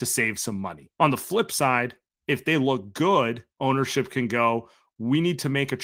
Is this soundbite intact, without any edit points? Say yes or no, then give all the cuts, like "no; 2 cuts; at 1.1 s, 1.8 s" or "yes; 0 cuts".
no; 3 cuts; at 0.9 s, 2.1 s, 3.5 s